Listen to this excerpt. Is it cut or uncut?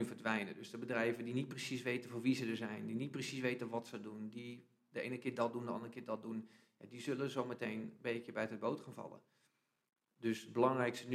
uncut